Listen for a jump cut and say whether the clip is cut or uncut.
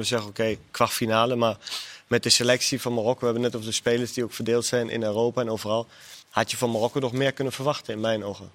cut